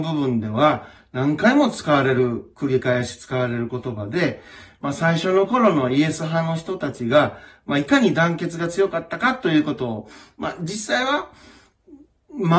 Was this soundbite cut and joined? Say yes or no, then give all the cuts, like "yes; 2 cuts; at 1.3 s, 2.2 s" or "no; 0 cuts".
no; 0 cuts